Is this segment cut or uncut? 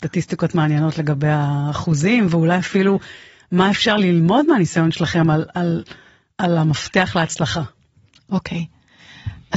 uncut